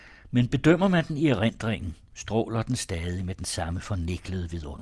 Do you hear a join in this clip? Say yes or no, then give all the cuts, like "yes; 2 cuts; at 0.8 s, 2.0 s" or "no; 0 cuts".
no; 0 cuts